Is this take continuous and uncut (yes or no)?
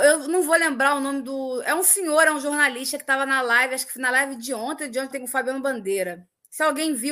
no